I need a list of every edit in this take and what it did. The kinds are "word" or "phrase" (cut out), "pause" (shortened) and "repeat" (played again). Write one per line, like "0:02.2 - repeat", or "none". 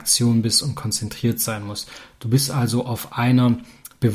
none